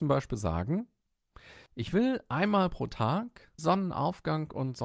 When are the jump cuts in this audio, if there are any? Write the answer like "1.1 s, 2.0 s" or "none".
1.7 s, 3.6 s